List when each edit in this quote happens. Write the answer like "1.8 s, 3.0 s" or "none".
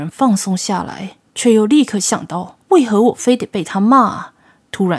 1.3 s, 2.6 s

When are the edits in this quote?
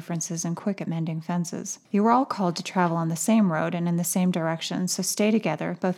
1.8 s

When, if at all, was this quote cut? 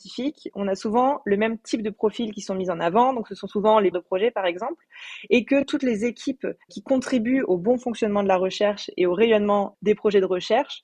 3.9 s, 6.6 s

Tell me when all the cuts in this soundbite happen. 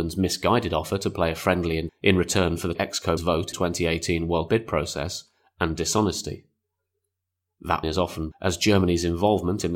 1.9 s, 2.7 s, 3.2 s, 3.5 s, 4.5 s, 7.8 s, 8.3 s

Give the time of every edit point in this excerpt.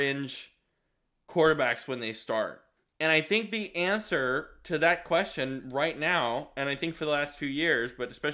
2.8 s

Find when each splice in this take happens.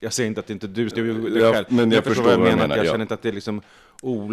0.9 s

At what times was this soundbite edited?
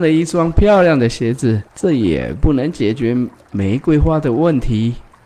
1.7 s

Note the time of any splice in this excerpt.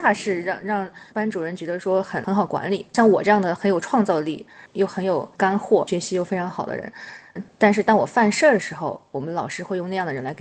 1.1 s, 5.3 s

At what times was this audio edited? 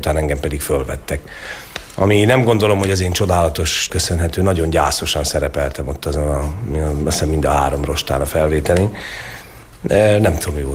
3.9 s

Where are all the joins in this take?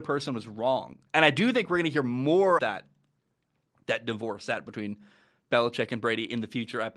1.1 s, 2.6 s, 4.7 s

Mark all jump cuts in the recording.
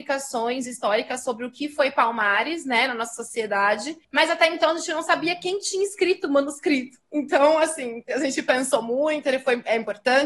4.0 s

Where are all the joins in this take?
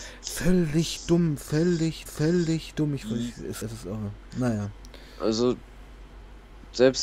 2.1 s, 3.6 s

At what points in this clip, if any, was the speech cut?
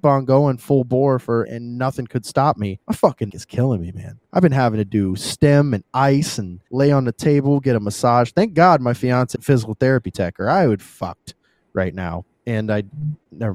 1.4 s, 2.8 s, 3.3 s, 4.3 s, 6.7 s, 9.3 s, 10.8 s, 12.3 s

